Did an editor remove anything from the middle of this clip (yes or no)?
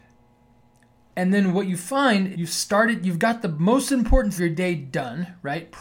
yes